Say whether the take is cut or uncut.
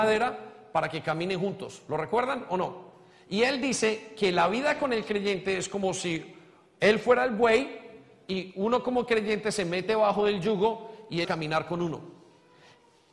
cut